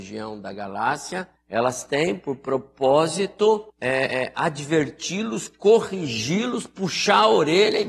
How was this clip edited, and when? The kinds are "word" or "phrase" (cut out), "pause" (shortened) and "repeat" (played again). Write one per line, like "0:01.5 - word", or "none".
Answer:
0:01.4 - pause
0:03.7 - pause